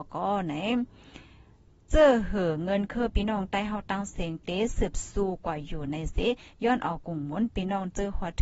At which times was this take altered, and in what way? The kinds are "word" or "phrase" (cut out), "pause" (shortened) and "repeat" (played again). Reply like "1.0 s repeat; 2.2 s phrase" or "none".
none

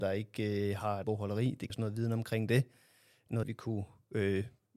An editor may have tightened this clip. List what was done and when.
1.0 s word; 1.7 s word; 3.4 s word

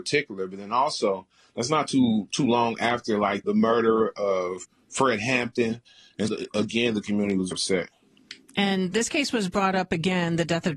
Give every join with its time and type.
3.4 s word; 6.3 s word; 7.5 s word; 8.9 s word

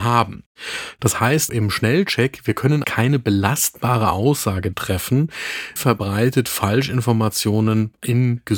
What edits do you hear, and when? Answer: 1.5 s word; 2.8 s word; 4.7 s word; 5.8 s word

